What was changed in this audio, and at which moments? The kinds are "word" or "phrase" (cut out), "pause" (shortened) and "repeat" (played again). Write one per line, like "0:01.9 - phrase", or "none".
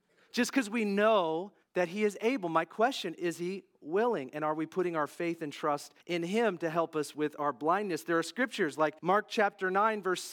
0:01.6 - pause
0:06.0 - pause
0:09.0 - pause

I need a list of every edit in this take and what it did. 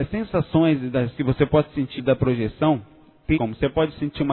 0:01.1 - word
0:02.0 - word
0:03.3 - word

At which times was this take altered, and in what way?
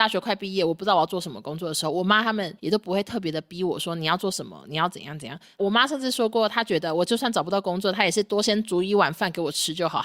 0:02.6 - pause

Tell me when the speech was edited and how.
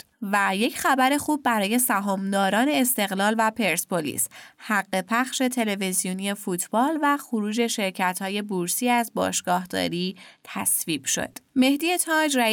none

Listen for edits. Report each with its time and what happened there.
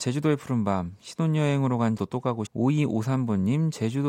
0:02.0 - word
0:02.5 - phrase

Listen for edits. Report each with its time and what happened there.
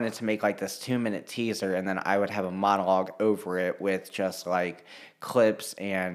none

